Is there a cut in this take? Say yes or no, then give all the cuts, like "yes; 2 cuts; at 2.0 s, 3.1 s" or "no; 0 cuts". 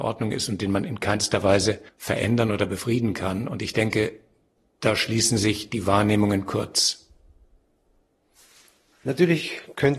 no; 0 cuts